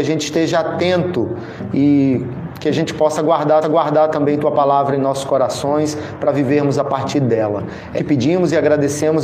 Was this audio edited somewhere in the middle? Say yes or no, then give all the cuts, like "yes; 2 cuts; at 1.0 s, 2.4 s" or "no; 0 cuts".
yes; 2 cuts; at 3.6 s, 8.0 s